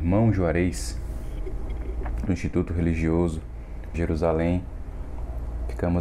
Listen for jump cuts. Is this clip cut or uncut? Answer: cut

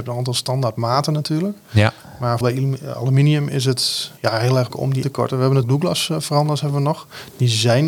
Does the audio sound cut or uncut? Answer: cut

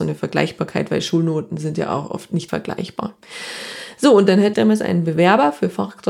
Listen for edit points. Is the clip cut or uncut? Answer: cut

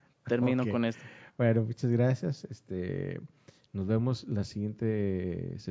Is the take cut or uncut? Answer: uncut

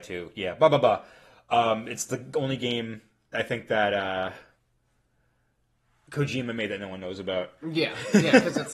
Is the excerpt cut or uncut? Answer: uncut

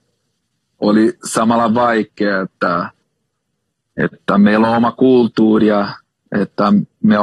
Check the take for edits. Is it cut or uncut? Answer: uncut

